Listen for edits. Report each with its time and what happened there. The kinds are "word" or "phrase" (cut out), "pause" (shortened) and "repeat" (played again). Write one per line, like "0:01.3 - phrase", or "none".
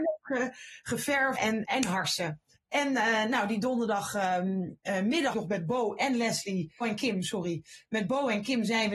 0:01.3 - word
0:01.6 - word
0:02.6 - pause
0:05.3 - phrase
0:06.8 - phrase